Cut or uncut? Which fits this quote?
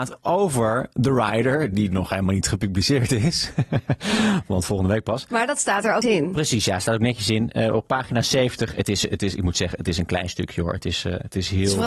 cut